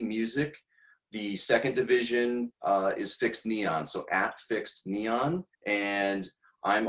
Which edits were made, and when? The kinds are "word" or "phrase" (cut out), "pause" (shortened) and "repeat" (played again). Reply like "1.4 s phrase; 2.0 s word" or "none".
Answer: 5.5 s pause